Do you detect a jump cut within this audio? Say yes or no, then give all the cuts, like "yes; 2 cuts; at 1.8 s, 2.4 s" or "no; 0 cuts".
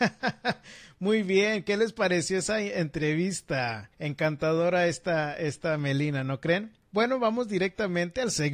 yes; 2 cuts; at 3.9 s, 6.8 s